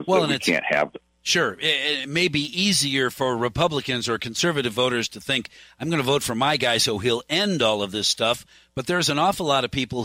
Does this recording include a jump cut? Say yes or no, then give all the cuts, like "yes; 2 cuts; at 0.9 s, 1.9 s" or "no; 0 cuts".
no; 0 cuts